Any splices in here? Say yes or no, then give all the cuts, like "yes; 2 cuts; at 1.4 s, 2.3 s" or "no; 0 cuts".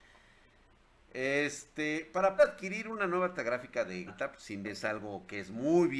yes; 4 cuts; at 2.4 s, 3.3 s, 4.1 s, 4.6 s